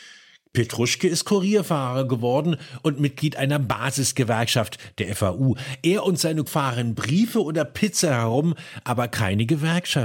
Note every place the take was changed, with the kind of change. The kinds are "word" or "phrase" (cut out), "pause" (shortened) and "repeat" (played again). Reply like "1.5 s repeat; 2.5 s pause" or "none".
6.5 s word